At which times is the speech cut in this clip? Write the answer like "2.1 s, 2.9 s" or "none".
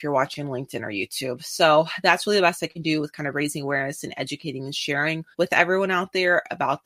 5.3 s